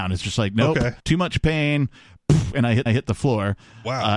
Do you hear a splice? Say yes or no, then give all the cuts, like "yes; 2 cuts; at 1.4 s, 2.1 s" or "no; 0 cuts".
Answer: yes; 2 cuts; at 1.0 s, 2.9 s